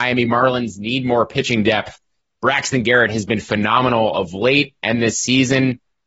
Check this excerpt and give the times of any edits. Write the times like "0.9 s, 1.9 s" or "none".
none

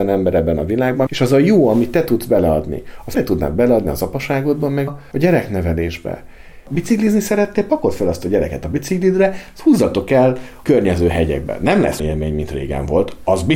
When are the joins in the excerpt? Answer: 1.1 s, 3.1 s, 4.9 s, 12.0 s

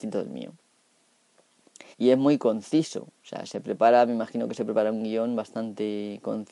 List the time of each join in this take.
1.9 s

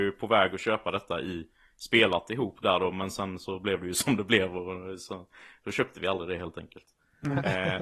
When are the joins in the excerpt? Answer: none

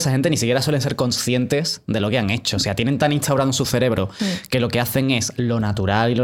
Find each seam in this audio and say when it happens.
none

